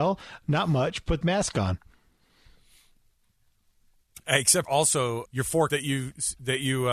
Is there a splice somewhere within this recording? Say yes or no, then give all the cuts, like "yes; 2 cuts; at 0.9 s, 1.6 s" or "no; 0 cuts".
yes; 4 cuts; at 1.2 s, 4.7 s, 5.3 s, 5.7 s